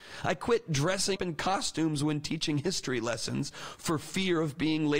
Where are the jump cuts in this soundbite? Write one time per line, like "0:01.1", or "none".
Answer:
0:01.2